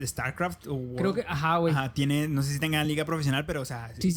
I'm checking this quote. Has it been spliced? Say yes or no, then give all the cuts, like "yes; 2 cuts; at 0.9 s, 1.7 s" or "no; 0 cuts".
no; 0 cuts